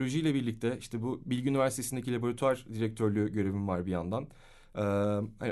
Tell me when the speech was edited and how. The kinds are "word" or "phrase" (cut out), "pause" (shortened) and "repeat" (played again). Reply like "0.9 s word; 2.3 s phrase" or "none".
none